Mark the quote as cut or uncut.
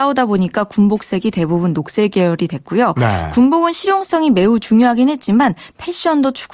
uncut